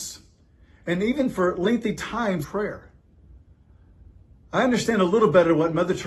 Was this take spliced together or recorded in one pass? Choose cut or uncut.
cut